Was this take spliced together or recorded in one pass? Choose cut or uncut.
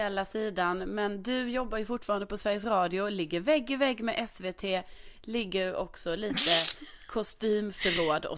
uncut